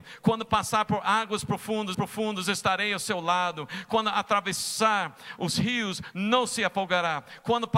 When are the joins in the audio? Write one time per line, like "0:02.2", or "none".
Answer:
0:01.9